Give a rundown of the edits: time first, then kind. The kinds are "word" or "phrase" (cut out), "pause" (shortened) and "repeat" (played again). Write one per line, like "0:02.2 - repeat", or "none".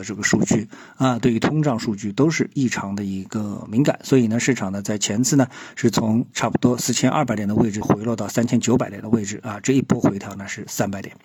0:06.3 - pause